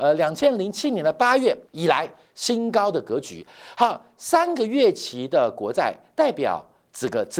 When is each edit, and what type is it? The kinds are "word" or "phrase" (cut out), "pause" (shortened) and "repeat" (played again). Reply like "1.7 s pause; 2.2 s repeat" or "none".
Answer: 1.7 s pause